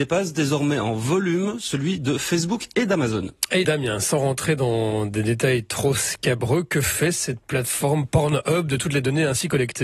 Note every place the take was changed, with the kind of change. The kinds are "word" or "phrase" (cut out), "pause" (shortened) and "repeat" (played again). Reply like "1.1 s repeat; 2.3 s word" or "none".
3.6 s word